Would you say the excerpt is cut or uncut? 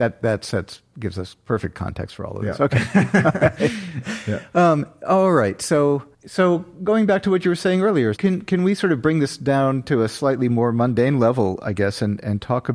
cut